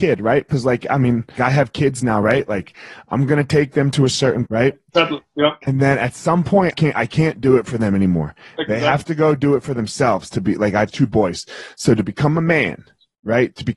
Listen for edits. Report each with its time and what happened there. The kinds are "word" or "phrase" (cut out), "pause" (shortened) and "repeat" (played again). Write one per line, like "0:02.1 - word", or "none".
0:01.4 - word
0:04.5 - word
0:06.7 - word